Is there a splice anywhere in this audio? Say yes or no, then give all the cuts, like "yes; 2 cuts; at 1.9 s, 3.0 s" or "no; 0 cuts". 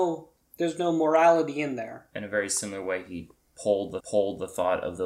yes; 1 cut; at 4.0 s